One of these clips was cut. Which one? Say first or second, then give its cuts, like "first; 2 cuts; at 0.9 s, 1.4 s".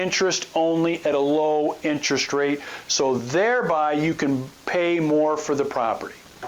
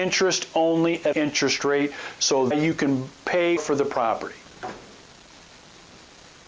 second; 3 cuts; at 1.1 s, 2.5 s, 3.6 s